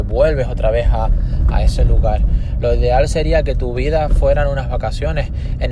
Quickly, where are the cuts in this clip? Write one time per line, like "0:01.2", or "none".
none